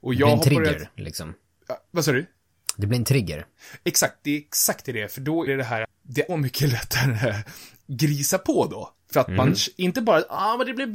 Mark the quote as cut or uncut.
cut